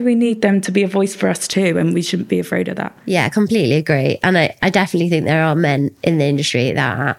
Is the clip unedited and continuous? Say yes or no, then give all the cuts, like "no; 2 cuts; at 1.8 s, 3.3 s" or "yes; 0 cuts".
yes; 0 cuts